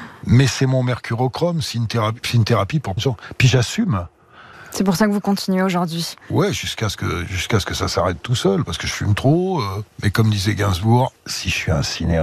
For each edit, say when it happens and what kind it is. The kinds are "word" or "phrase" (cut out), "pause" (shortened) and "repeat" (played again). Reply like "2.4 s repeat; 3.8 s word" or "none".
3.0 s word; 11.2 s pause